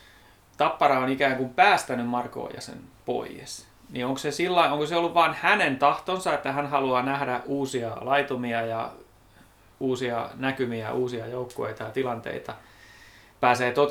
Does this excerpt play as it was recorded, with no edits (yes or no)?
yes